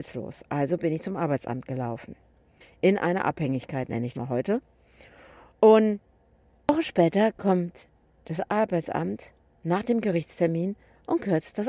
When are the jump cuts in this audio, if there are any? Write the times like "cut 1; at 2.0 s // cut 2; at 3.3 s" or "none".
cut 1; at 4.1 s